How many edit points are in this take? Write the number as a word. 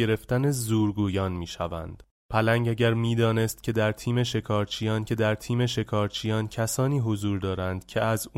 one